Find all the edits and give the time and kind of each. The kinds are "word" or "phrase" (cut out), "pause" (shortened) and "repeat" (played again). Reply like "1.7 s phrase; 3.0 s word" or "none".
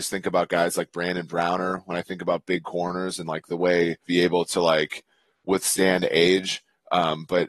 4.0 s phrase